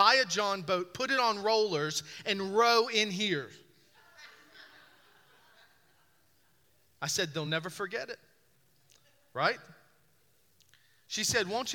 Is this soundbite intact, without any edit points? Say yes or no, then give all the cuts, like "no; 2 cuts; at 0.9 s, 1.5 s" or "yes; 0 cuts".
yes; 0 cuts